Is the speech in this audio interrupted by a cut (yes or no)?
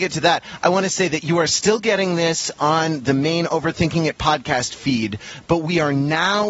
no